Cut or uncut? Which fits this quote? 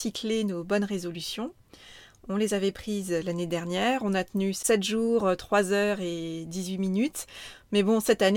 uncut